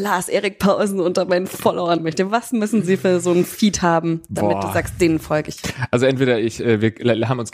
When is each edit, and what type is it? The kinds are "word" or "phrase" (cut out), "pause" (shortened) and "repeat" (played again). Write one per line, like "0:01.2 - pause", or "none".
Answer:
0:02.0 - word

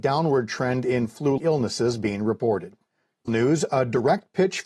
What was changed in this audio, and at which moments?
0:01.4 - word
0:03.3 - word

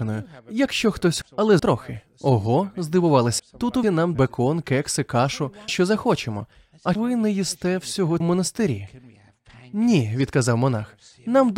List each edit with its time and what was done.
0:01.2 - word
0:01.6 - word
0:03.4 - word
0:03.8 - word
0:04.1 - word
0:05.7 - word
0:07.0 - word
0:08.2 - word

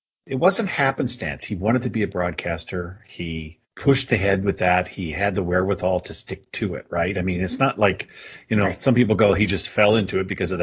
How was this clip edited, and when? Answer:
0:03.6 - pause

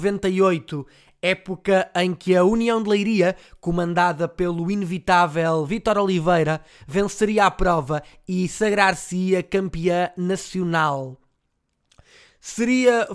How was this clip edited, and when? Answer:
none

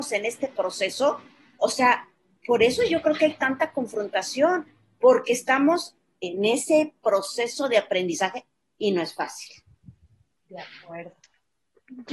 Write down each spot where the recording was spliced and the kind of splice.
none

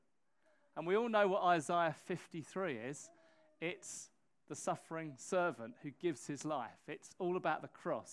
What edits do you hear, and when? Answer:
none

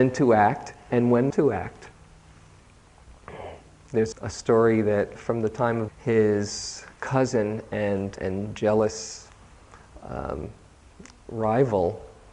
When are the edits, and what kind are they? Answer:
0:01.3 - word
0:04.1 - word
0:05.2 - word
0:05.9 - phrase
0:06.9 - pause
0:08.2 - word

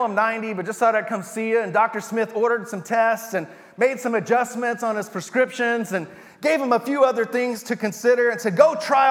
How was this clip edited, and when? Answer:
none

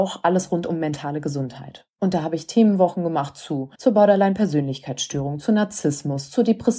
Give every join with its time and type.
0:03.7 - pause

